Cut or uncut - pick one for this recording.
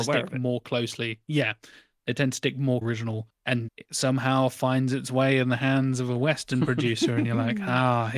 cut